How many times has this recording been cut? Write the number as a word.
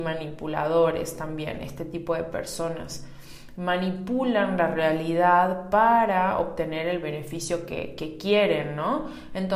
zero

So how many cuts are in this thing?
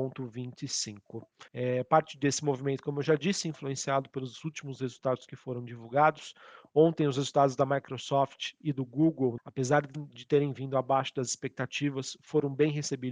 two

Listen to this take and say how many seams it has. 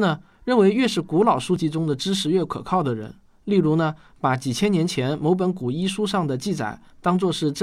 zero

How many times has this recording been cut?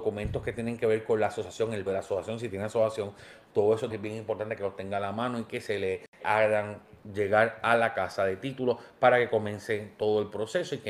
three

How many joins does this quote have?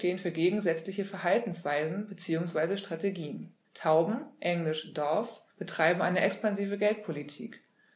two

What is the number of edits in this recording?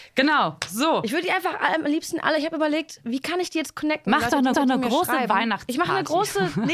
one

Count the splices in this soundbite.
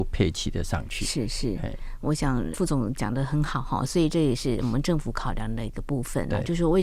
one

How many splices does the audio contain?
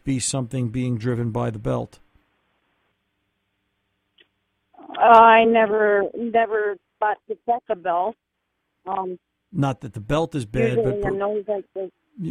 zero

